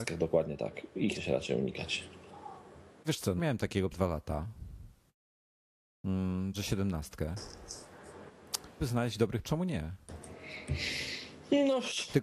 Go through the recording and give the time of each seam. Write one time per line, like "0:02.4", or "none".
0:01.1
0:03.0
0:03.4
0:03.9
0:06.5
0:08.8
0:09.4